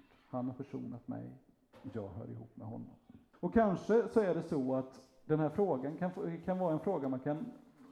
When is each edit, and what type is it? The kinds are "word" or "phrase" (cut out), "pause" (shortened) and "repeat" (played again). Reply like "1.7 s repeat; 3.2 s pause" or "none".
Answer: 3.3 s pause